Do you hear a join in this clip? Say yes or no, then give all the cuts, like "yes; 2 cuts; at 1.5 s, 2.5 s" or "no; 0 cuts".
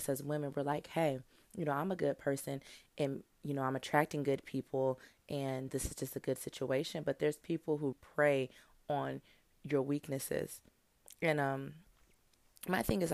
yes; 2 cuts; at 5.7 s, 7.9 s